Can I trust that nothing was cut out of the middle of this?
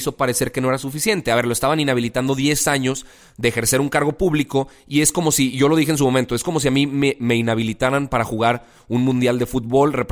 yes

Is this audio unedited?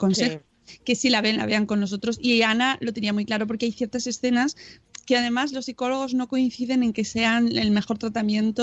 yes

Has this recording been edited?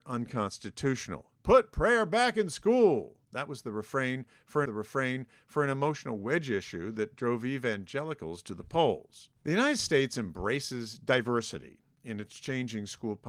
yes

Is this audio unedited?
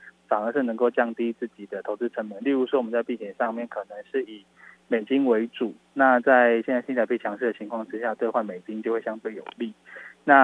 yes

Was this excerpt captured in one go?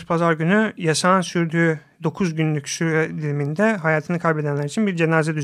yes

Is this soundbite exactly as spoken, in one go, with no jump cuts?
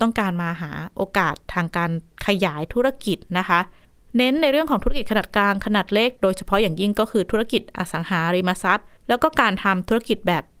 no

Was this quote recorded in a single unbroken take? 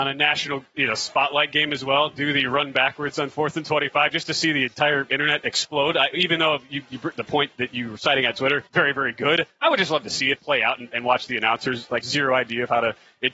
no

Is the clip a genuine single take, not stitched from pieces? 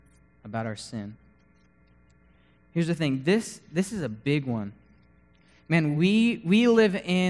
yes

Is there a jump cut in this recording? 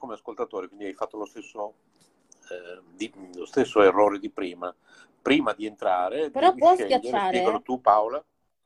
no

